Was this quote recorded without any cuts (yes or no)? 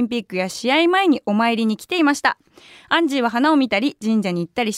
yes